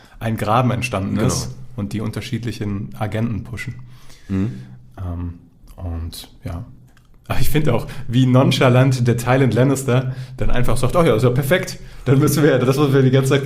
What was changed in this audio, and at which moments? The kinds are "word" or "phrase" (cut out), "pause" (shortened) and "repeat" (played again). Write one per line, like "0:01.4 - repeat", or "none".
0:06.9 - pause